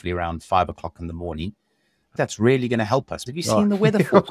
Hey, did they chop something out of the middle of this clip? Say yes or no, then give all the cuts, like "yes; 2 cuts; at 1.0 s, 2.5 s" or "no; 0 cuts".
yes; 2 cuts; at 2.2 s, 3.3 s